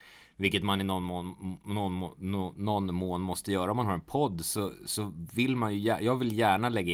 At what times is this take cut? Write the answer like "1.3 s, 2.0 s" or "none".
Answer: none